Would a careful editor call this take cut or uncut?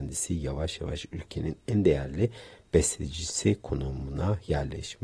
uncut